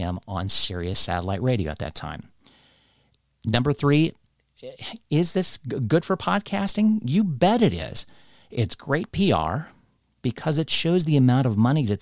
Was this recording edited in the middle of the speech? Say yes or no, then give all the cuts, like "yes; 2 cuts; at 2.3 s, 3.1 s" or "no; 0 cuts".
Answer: no; 0 cuts